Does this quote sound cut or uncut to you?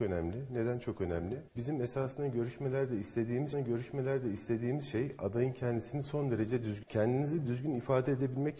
cut